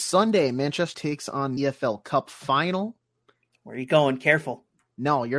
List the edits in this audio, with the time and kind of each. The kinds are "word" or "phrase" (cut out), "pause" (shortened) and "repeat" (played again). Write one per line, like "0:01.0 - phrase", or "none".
0:00.9 - word
0:01.6 - phrase